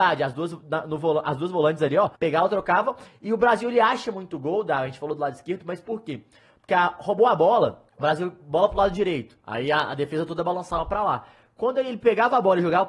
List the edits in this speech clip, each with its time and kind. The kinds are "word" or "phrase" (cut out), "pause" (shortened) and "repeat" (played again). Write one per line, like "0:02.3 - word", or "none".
0:02.1 - pause
0:07.9 - pause
0:09.4 - pause